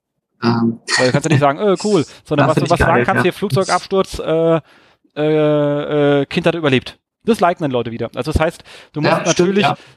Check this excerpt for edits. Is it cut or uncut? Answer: uncut